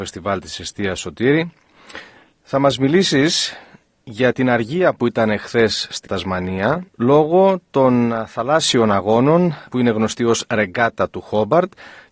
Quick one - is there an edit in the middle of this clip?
yes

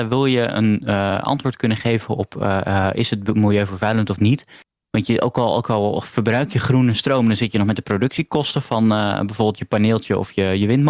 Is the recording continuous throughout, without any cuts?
yes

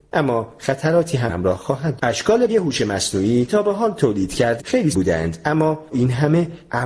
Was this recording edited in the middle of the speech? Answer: yes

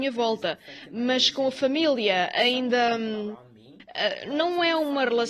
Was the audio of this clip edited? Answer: no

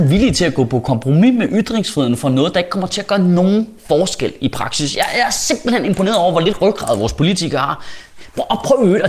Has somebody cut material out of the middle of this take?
no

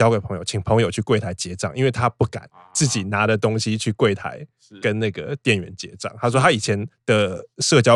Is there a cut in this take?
no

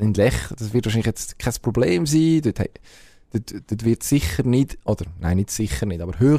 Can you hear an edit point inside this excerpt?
no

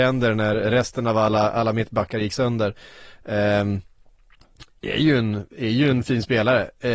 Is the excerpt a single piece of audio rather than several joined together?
yes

